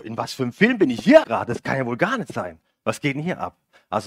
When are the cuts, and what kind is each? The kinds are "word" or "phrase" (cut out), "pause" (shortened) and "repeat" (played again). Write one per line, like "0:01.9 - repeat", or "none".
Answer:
0:01.2 - word